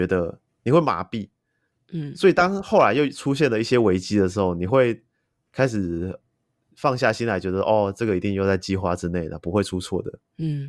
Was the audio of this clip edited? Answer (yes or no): no